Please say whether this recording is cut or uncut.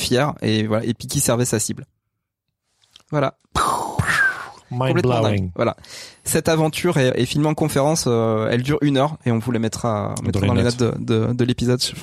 cut